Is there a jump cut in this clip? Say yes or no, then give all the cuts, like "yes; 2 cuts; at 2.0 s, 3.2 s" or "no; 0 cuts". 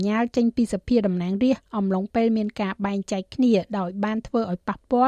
no; 0 cuts